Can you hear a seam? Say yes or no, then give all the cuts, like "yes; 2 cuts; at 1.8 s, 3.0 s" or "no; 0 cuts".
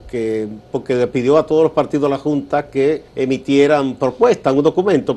yes; 1 cut; at 3.1 s